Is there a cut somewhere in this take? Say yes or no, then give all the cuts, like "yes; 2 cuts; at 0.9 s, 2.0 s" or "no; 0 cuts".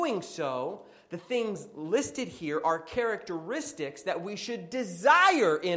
no; 0 cuts